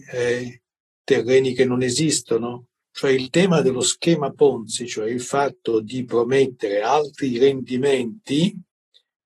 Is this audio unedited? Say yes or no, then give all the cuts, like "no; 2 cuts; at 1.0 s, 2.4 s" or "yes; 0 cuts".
yes; 0 cuts